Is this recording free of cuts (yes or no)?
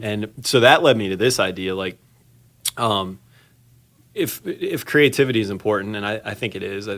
yes